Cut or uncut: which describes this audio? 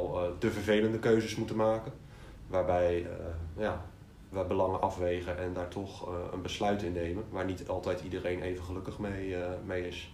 uncut